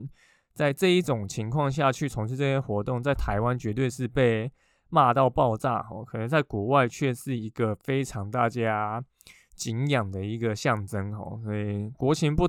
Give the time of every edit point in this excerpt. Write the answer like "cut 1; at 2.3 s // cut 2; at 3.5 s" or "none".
none